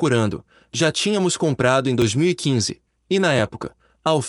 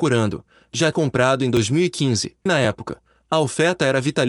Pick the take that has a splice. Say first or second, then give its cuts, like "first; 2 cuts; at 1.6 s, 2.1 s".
second; 2 cuts; at 0.9 s, 2.5 s